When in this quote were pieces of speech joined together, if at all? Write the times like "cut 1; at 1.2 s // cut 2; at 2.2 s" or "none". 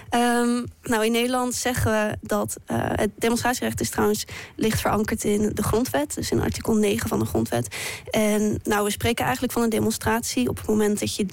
cut 1; at 8.6 s